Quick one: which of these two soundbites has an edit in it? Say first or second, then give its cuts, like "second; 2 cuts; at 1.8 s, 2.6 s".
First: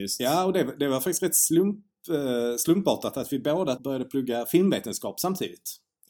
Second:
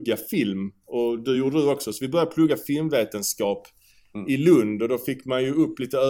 first; 1 cut; at 3.8 s